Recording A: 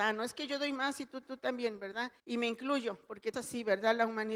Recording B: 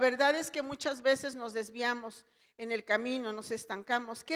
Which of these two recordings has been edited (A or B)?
A